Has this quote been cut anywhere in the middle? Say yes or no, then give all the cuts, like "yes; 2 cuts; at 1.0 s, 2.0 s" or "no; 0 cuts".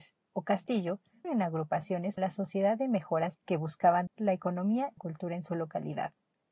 yes; 5 cuts; at 1.2 s, 2.2 s, 3.4 s, 4.1 s, 5.0 s